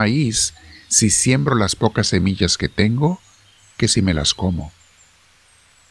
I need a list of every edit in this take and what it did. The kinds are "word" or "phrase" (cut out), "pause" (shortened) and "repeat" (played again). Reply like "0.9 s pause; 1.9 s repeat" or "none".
none